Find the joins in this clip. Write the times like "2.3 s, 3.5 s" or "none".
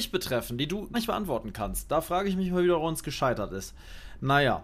0.9 s